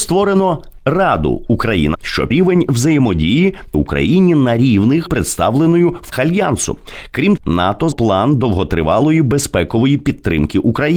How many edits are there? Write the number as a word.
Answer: seven